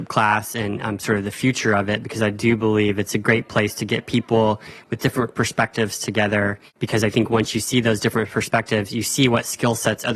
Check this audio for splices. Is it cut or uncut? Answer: cut